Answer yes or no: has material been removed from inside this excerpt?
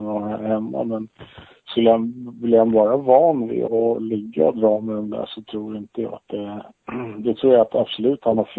yes